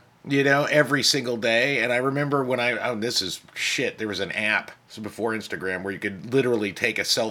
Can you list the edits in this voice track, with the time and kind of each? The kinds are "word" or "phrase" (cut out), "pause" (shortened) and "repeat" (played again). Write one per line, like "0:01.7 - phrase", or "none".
0:03.5 - pause
0:04.8 - pause